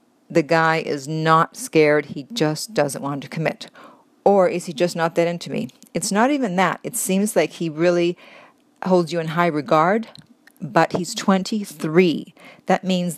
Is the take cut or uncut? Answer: uncut